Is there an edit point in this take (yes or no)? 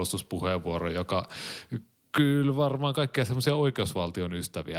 no